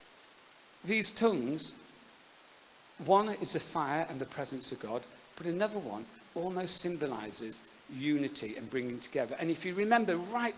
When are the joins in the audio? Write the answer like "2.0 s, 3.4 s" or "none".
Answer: none